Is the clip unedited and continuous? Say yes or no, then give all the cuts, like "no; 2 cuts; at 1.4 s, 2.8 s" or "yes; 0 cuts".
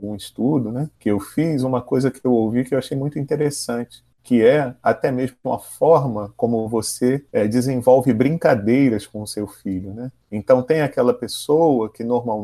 no; 4 cuts; at 1.0 s, 4.1 s, 7.3 s, 10.2 s